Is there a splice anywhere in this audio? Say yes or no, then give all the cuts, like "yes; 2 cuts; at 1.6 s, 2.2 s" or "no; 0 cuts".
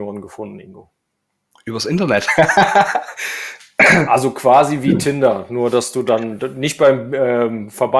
no; 0 cuts